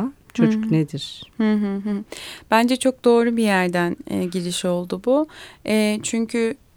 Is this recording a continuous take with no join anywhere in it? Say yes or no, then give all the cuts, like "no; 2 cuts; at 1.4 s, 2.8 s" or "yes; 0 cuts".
yes; 0 cuts